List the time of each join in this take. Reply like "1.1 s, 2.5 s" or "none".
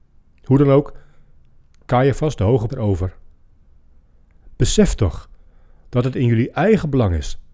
2.7 s